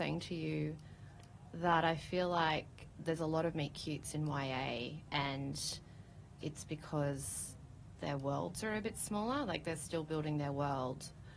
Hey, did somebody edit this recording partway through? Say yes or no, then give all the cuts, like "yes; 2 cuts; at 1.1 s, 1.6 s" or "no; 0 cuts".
yes; 1 cut; at 6.4 s